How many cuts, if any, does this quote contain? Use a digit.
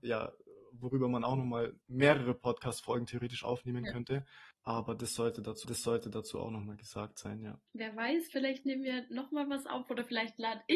3